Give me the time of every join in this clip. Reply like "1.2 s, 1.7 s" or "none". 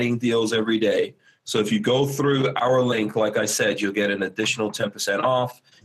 none